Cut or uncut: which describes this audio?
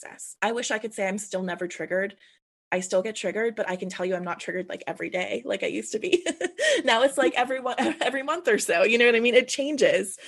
uncut